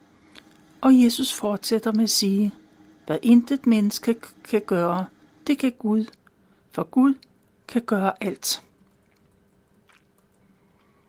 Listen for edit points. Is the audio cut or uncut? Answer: uncut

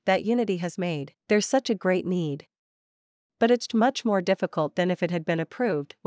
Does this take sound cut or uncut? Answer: cut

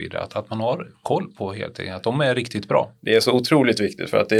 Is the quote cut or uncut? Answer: uncut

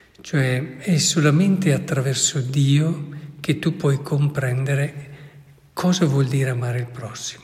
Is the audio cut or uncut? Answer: uncut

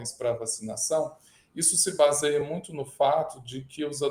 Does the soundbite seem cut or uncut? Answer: uncut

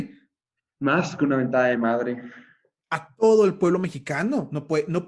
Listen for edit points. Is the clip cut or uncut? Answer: uncut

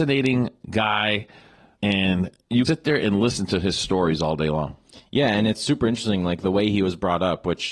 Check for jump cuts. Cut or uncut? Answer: cut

